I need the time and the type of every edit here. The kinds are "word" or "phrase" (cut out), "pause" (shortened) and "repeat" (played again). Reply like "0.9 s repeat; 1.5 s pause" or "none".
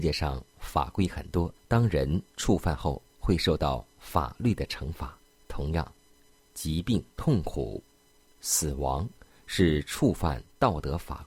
1.6 s pause; 2.3 s pause; 3.1 s pause; 5.3 s pause; 7.1 s pause